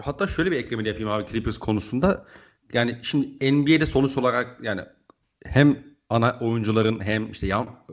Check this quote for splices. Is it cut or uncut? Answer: uncut